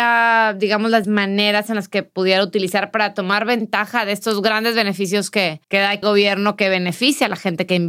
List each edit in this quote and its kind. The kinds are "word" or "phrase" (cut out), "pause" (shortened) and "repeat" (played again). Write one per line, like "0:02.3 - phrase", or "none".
0:01.0 - word
0:05.6 - pause
0:06.0 - word